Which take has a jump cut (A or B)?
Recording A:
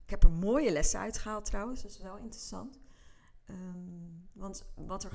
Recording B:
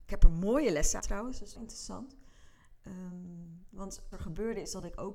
B